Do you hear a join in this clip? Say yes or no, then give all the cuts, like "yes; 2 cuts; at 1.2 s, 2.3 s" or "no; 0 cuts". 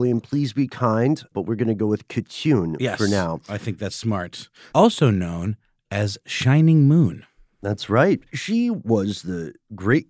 yes; 2 cuts; at 1.3 s, 8.3 s